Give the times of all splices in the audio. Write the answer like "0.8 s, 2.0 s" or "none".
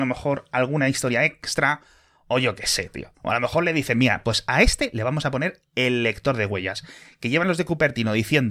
none